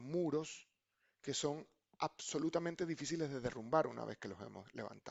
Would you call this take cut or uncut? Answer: uncut